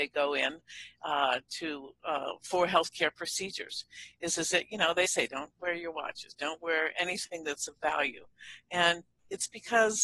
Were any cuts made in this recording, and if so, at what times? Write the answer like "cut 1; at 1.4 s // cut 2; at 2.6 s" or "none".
cut 1; at 5.0 s

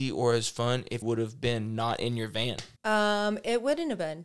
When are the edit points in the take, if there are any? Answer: cut 1; at 1.0 s // cut 2; at 2.8 s

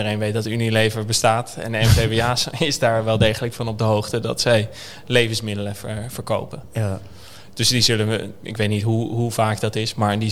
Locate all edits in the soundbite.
none

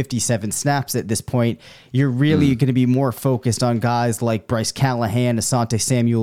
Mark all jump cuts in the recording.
none

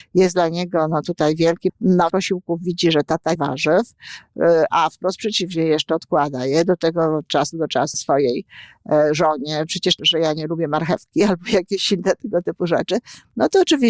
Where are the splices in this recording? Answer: cut 1; at 1.7 s // cut 2; at 2.1 s // cut 3; at 3.3 s // cut 4; at 7.9 s // cut 5; at 10.0 s

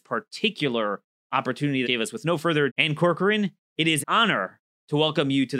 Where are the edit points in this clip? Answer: cut 1; at 1.8 s // cut 2; at 2.7 s // cut 3; at 4.0 s

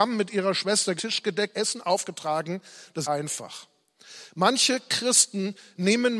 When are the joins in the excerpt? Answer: cut 1; at 1.0 s // cut 2; at 1.5 s // cut 3; at 3.0 s

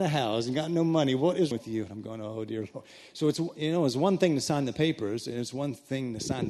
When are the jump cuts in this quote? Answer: cut 1; at 1.5 s

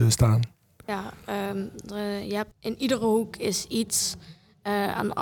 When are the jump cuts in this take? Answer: cut 1; at 2.5 s

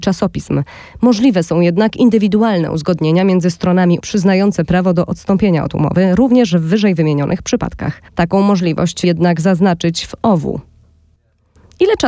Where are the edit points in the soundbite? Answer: cut 1; at 4.0 s // cut 2; at 8.1 s // cut 3; at 9.0 s

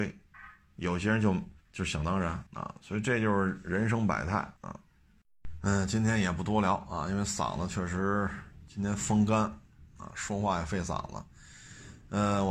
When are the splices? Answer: cut 1; at 1.6 s // cut 2; at 2.5 s // cut 3; at 4.6 s

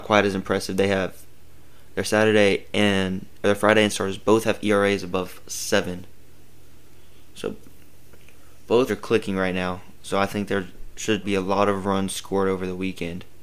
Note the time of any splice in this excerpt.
cut 1; at 3.9 s // cut 2; at 8.9 s // cut 3; at 11.2 s

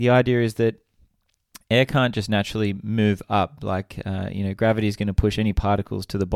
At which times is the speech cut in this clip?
none

